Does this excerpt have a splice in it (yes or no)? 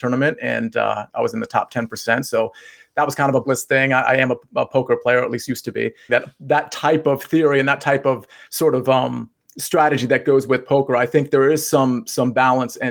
yes